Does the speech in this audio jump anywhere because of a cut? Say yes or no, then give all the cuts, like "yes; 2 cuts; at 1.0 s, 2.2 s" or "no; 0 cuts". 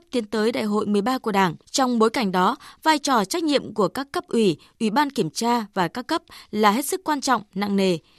yes; 1 cut; at 1.6 s